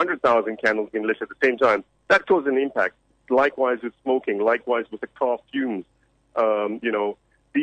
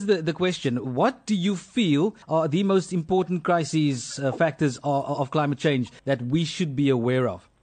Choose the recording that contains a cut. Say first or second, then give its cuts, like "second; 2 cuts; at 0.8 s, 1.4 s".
second; 2 cuts; at 2.2 s, 6.0 s